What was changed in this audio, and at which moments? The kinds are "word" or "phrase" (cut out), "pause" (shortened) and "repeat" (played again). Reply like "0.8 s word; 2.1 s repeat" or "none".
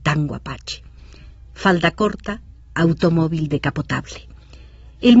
none